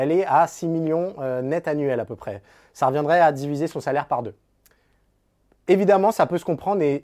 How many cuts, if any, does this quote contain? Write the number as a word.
zero